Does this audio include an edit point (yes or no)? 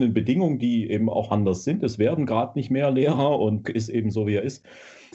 yes